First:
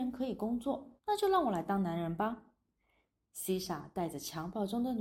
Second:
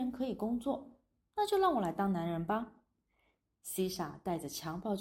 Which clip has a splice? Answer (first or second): first